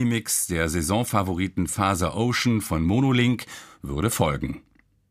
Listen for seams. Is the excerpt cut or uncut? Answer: uncut